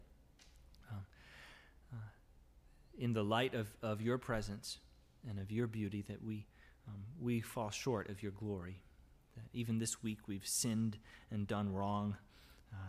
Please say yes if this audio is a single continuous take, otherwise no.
yes